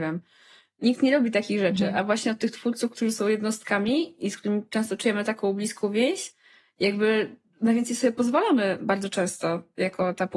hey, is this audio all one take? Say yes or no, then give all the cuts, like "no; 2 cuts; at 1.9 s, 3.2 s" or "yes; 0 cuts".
yes; 0 cuts